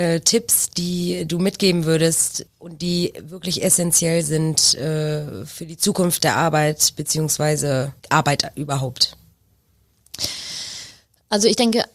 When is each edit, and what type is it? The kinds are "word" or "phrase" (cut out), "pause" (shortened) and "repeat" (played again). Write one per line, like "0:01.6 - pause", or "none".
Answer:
0:02.5 - pause
0:08.0 - pause